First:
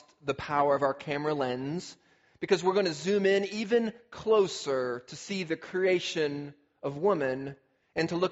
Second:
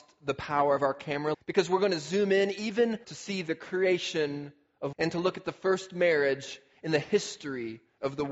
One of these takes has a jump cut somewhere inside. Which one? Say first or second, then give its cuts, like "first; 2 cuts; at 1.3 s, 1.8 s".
second; 3 cuts; at 1.3 s, 3.0 s, 4.9 s